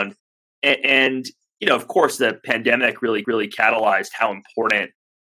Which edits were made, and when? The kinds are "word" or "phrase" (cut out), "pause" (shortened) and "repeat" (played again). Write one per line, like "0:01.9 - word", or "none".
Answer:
0:03.2 - repeat